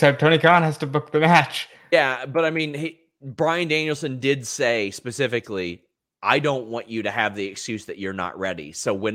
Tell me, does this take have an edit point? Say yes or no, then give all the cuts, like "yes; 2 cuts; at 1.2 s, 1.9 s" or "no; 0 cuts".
no; 0 cuts